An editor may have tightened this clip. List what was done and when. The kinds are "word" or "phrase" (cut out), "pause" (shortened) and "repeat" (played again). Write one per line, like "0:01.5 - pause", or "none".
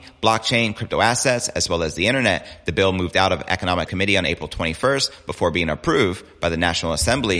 0:03.9 - word